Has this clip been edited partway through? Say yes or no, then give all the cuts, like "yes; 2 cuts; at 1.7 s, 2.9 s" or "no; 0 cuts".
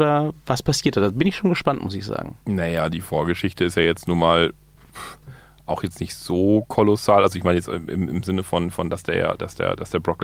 yes; 1 cut; at 2.4 s